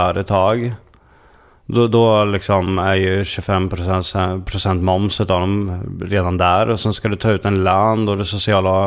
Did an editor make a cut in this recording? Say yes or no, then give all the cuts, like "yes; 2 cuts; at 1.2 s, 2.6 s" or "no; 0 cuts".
no; 0 cuts